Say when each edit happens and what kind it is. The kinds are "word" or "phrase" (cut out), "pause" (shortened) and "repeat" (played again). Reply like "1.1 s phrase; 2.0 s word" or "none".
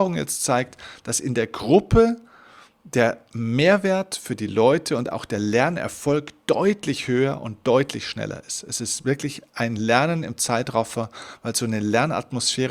none